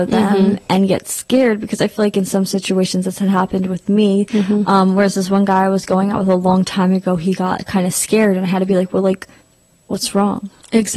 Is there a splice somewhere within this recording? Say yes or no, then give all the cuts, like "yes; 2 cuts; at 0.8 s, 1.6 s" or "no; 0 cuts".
yes; 1 cut; at 9.4 s